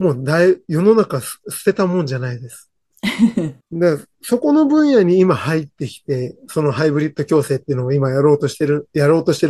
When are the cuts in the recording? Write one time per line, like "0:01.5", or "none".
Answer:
0:03.6